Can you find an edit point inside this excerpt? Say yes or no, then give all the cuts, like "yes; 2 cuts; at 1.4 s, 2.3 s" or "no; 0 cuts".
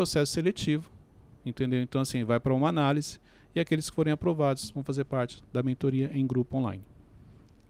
no; 0 cuts